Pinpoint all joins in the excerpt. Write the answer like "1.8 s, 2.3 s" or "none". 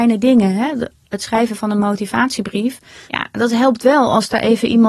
3.1 s